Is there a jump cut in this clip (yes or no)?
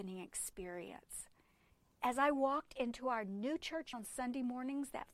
yes